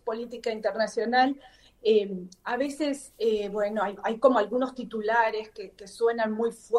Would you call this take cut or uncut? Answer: uncut